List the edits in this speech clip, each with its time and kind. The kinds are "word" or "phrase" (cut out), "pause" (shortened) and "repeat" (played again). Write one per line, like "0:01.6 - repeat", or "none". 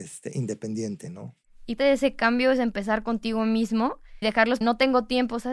0:01.8 - word
0:04.2 - word
0:04.6 - phrase